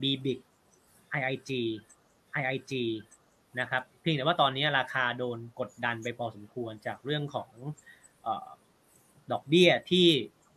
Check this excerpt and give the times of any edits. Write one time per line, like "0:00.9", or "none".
0:02.3